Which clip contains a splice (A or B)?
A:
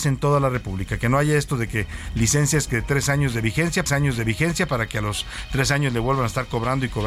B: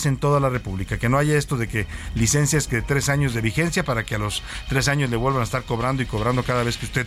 A